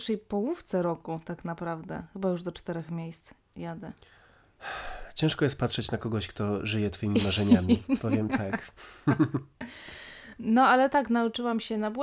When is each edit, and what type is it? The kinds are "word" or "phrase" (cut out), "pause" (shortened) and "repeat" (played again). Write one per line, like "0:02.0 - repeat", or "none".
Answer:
none